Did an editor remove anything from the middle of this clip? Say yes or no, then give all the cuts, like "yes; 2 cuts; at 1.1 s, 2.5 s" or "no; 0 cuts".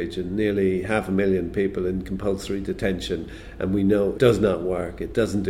yes; 1 cut; at 4.2 s